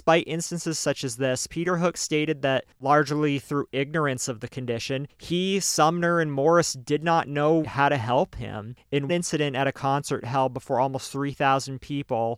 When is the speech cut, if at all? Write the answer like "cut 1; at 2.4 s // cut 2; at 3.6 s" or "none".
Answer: cut 1; at 7.6 s // cut 2; at 9.1 s